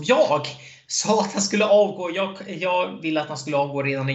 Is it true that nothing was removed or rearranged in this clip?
yes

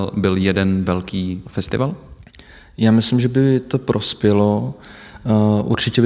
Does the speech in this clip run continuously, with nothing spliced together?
yes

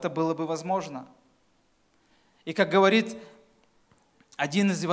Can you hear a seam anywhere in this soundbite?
no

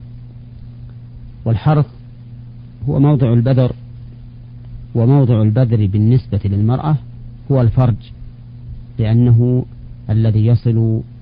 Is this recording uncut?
yes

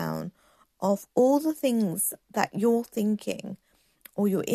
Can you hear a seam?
no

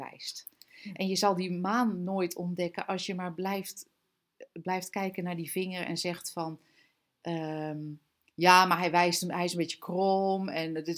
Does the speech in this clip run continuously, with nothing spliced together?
yes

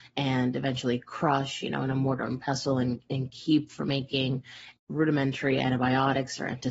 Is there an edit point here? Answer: yes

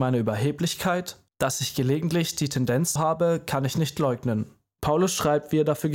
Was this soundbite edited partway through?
yes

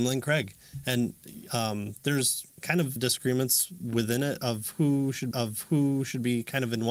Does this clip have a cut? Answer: yes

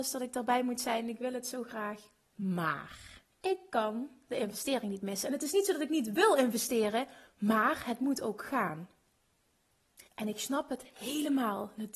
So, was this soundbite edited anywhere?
yes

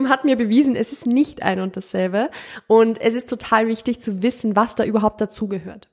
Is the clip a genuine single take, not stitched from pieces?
yes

